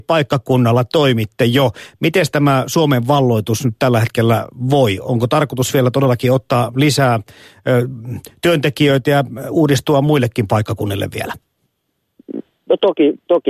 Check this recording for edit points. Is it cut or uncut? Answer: uncut